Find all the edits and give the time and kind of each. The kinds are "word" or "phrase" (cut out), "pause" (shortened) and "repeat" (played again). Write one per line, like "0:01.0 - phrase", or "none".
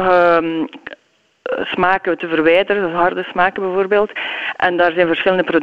none